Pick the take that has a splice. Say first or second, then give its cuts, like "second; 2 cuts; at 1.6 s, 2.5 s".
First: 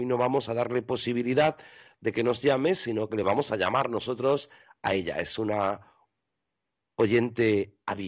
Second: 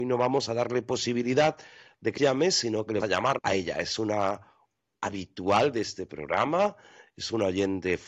second; 4 cuts; at 2.2 s, 3.0 s, 3.4 s, 4.9 s